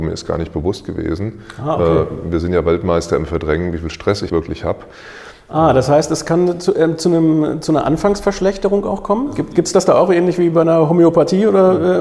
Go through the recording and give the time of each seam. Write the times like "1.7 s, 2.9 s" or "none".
4.3 s